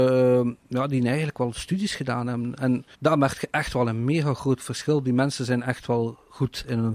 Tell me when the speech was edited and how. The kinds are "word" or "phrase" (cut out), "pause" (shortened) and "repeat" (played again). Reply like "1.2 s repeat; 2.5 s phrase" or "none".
2.9 s pause